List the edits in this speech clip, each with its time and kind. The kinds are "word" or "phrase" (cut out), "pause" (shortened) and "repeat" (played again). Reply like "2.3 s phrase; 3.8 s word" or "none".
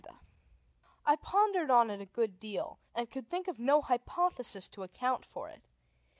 2.9 s pause